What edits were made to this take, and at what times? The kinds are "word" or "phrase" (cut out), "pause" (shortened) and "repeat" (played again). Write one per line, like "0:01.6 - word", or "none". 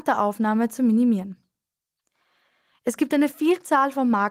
none